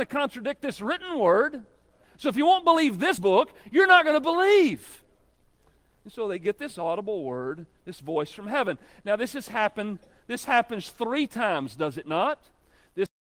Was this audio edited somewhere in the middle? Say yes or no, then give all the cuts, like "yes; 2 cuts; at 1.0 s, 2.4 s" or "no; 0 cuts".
no; 0 cuts